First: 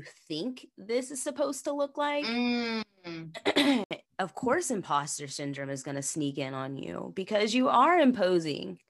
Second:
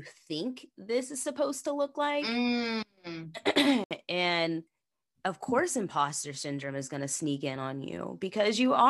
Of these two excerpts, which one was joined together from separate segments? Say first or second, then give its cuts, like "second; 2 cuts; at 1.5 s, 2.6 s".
first; 1 cut; at 4.1 s